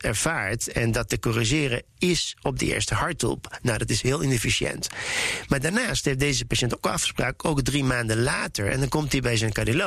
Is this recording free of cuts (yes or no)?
yes